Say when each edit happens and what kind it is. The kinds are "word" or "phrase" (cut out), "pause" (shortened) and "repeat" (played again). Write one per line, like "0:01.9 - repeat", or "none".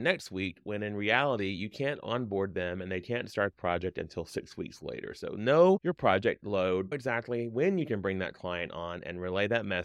0:03.5 - word
0:06.9 - word

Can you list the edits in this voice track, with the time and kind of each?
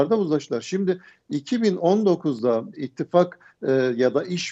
0:02.7 - phrase

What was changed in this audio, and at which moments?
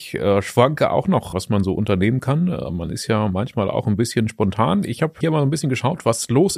0:01.3 - word
0:05.2 - word

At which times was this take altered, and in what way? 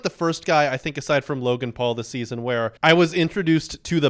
0:02.8 - pause

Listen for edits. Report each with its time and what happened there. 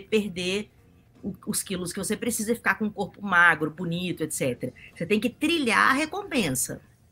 none

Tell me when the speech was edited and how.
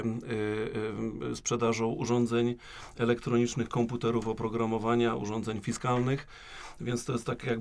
none

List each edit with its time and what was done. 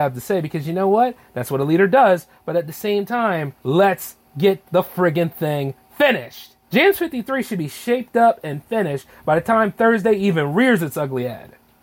0:03.6 - pause
0:04.7 - pause
0:06.6 - pause

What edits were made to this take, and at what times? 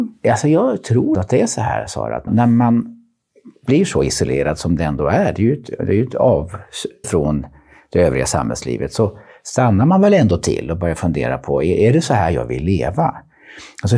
0:01.1 - word
0:02.3 - word
0:07.0 - word

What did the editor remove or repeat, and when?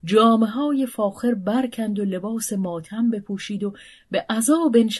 none

